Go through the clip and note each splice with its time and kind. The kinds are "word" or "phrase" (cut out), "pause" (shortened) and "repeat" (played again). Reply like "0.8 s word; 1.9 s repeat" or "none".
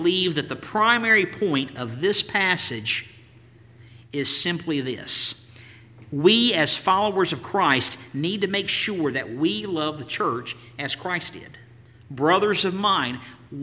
none